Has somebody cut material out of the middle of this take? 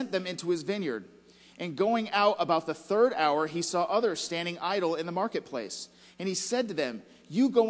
no; 0 cuts

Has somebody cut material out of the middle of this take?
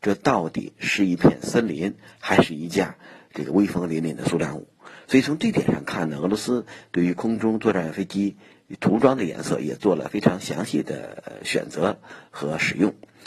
no; 0 cuts

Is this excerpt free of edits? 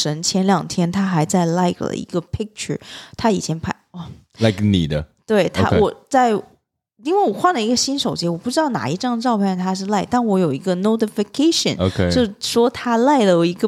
yes; 0 cuts

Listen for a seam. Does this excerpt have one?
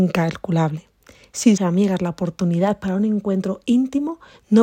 yes; 1 cut; at 1.6 s

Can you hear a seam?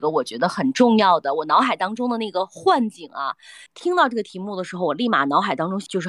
no; 0 cuts

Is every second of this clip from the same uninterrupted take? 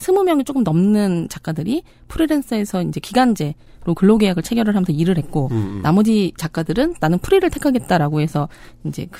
yes; 0 cuts

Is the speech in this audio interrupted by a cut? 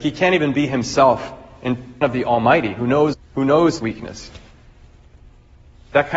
yes; 3 cuts; at 2.0 s, 3.1 s, 3.8 s

